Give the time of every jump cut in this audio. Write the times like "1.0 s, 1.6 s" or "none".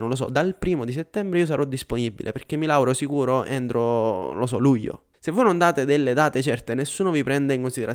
5.1 s